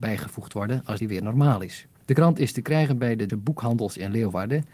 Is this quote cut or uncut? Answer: cut